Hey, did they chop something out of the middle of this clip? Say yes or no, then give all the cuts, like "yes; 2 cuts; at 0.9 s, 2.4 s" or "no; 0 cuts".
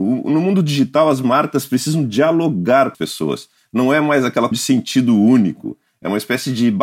yes; 2 cuts; at 2.9 s, 4.5 s